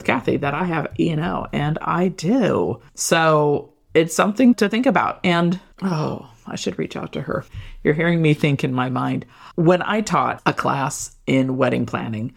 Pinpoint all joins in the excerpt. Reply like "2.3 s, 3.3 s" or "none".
2.9 s